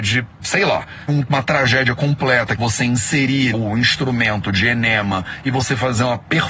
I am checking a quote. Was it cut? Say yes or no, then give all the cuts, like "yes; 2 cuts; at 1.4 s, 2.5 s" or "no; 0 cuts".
yes; 3 cuts; at 1.1 s, 2.6 s, 3.5 s